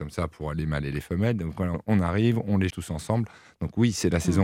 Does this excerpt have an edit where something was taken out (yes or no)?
yes